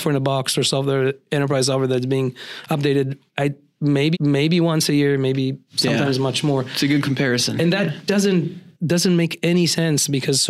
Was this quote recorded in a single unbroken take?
no; 3 cuts; at 3.3 s, 4.1 s, 8.7 s

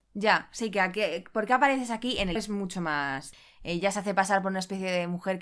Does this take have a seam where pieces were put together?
yes; 1 cut; at 2.4 s

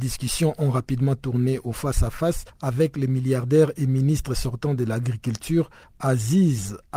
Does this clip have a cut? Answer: no; 0 cuts

